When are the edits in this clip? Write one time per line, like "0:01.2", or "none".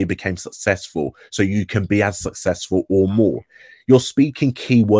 none